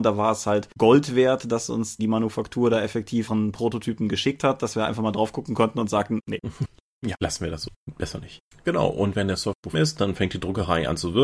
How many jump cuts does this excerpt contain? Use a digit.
5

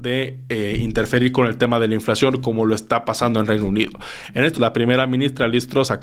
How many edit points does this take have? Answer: 1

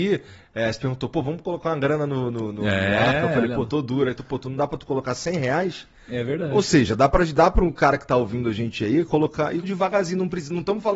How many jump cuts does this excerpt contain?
1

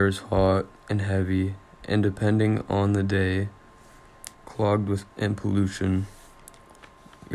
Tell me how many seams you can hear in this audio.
2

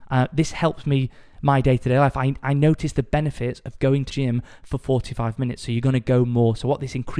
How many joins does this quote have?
1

